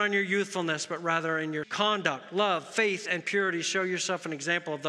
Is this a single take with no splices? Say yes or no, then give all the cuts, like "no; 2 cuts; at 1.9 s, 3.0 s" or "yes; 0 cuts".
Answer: no; 1 cut; at 1.6 s